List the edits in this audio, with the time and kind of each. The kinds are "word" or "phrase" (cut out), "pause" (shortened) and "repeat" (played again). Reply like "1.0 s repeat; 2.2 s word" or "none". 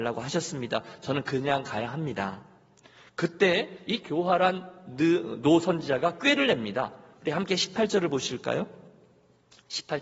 none